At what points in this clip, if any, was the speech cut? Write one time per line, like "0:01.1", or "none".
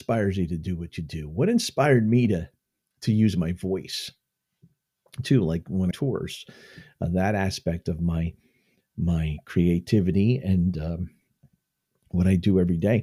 0:05.9